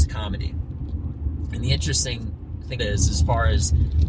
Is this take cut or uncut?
cut